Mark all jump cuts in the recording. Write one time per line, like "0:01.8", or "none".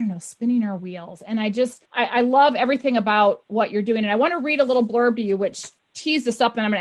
0:01.9